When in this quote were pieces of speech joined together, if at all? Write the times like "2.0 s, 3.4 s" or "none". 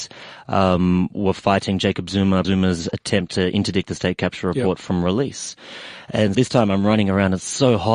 2.4 s, 6.3 s